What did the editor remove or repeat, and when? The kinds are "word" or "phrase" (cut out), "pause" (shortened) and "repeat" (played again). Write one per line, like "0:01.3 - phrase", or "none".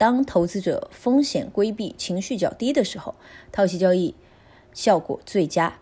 none